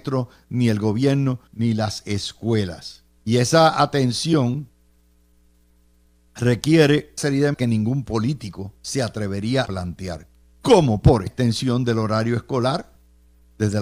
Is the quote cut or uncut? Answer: cut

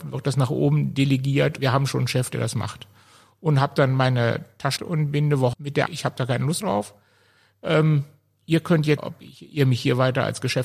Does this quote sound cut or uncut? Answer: cut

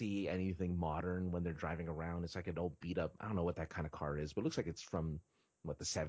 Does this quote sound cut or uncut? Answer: uncut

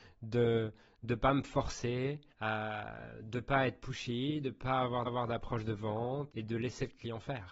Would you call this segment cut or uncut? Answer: cut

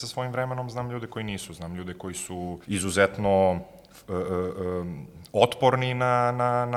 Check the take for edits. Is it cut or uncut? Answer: cut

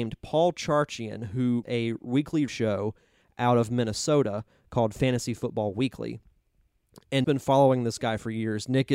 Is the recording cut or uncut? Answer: cut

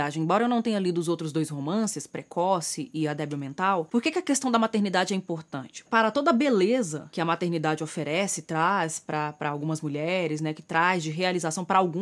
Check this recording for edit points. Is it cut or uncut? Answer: uncut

